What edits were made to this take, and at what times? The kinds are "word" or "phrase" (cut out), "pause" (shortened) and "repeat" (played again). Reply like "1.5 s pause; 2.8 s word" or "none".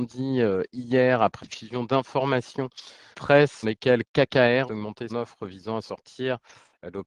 1.4 s word; 3.1 s word; 3.6 s word; 4.7 s word; 5.1 s word